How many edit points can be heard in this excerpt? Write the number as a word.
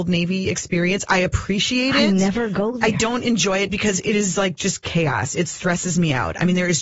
zero